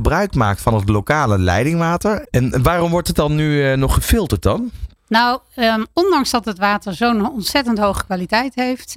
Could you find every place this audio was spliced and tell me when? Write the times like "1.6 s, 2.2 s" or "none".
none